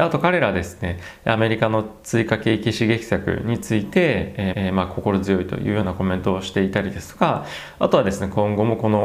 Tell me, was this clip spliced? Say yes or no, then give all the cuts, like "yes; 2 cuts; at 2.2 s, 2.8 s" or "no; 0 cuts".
yes; 1 cut; at 4.5 s